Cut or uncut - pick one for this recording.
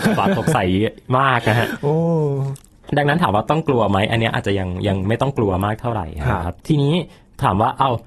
cut